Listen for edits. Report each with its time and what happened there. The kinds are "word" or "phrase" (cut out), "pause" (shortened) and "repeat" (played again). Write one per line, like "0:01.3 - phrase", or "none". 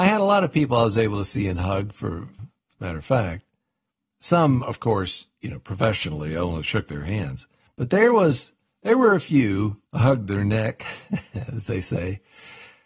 0:02.4 - word
0:09.9 - pause